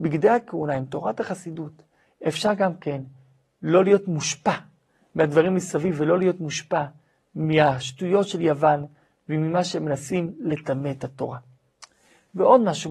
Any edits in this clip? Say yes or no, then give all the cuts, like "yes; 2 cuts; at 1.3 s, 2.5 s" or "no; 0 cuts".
no; 0 cuts